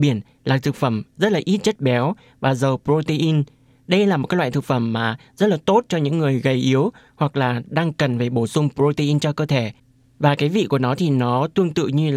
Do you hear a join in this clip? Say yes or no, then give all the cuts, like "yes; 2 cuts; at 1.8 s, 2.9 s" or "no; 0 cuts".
no; 0 cuts